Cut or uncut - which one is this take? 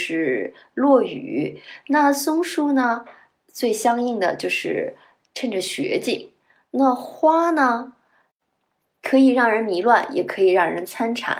uncut